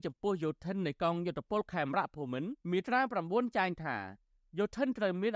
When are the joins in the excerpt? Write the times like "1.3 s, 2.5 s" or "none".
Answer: 2.6 s

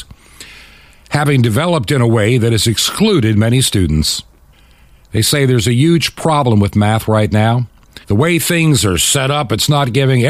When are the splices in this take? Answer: 4.5 s, 8.0 s

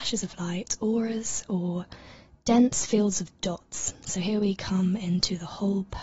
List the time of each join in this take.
none

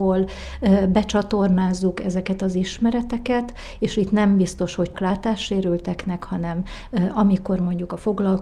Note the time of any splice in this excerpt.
4.9 s

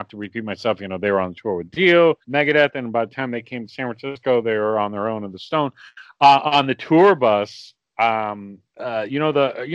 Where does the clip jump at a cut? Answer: 2.2 s, 8.7 s

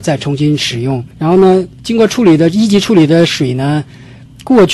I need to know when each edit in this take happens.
1.1 s

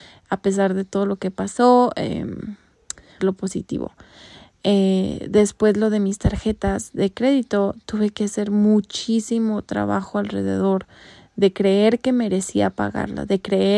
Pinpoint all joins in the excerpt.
3.2 s

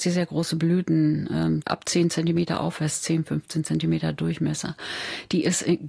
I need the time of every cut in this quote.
1.6 s

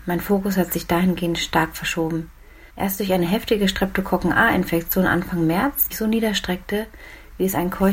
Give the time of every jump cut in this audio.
2.7 s, 5.9 s

